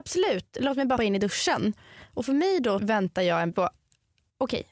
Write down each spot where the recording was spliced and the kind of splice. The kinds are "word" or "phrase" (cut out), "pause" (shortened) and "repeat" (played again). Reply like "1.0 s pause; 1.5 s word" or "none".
1.0 s word; 2.8 s word; 3.5 s word

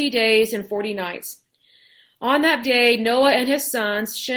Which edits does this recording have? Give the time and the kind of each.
2.6 s word

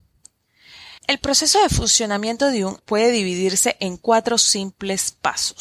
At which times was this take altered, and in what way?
1.0 s pause; 2.8 s phrase

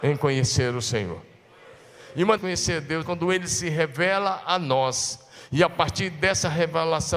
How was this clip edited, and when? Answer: 2.4 s phrase; 3.0 s word

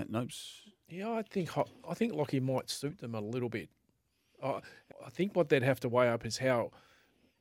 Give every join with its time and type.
4.9 s word

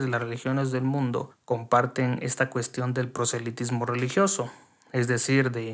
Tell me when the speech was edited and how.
none

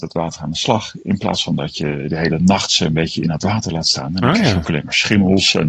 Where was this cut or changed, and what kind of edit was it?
none

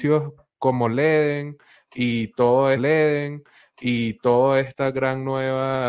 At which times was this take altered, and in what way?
2.8 s repeat

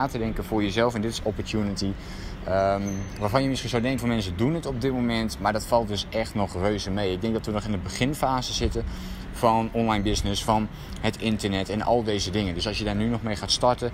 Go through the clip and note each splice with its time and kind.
1.2 s phrase; 4.0 s word

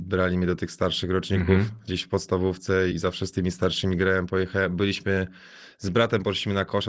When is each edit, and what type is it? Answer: 2.9 s word

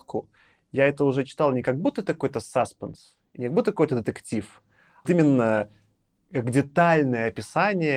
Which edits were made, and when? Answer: 5.0 s word

